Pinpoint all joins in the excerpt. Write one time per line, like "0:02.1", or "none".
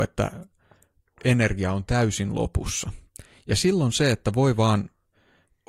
none